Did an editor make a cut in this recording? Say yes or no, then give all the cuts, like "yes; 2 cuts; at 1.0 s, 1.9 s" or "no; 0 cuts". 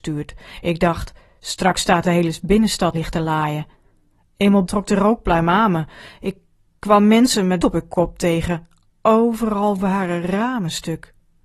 yes; 3 cuts; at 2.9 s, 4.7 s, 7.6 s